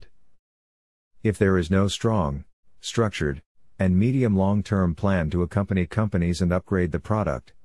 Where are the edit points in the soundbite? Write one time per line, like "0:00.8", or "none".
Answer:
none